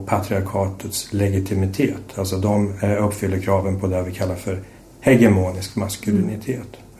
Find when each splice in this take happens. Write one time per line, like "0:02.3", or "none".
none

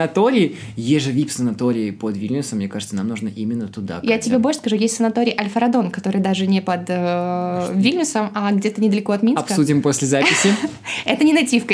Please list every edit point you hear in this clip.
none

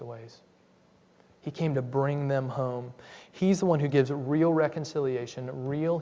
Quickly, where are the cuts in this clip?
none

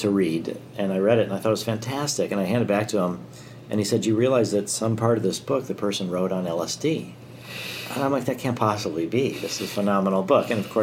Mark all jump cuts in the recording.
none

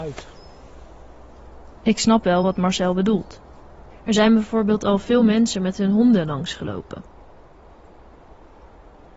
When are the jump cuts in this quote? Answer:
none

